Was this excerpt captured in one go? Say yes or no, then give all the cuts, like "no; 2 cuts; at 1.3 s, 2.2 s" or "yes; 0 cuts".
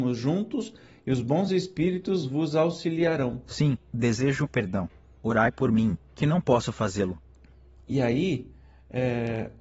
yes; 0 cuts